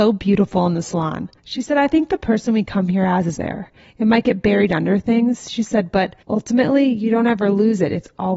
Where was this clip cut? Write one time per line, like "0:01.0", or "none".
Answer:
0:01.4
0:03.4
0:06.2